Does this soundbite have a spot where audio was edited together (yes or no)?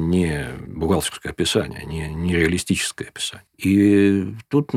yes